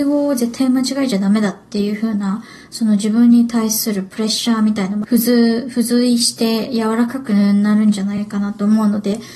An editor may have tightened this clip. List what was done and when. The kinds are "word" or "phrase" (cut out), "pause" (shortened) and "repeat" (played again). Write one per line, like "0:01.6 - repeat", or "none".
none